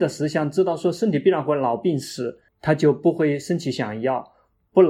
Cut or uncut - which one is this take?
cut